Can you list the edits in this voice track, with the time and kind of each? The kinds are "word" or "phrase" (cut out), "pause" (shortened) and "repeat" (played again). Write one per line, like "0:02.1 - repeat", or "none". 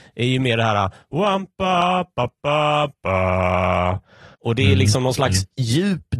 0:04.3 - pause